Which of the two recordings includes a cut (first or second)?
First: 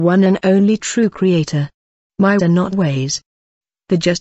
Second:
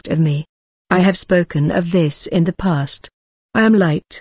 first